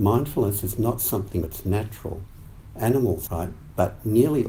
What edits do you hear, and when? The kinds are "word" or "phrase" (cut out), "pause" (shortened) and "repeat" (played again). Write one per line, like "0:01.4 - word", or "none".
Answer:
0:01.4 - word
0:03.3 - phrase